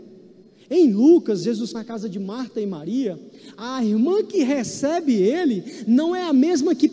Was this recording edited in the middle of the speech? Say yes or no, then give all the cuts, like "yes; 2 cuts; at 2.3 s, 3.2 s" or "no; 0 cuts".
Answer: yes; 1 cut; at 1.7 s